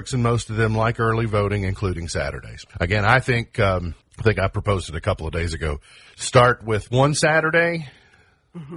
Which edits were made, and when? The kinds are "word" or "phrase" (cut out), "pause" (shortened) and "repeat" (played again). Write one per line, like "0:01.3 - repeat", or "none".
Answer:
0:02.7 - pause
0:04.0 - pause
0:06.1 - pause